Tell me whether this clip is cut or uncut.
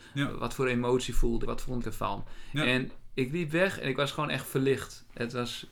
cut